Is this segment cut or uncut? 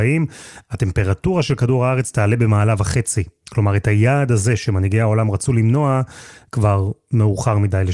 uncut